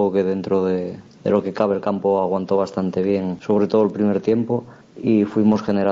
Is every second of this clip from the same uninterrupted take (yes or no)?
no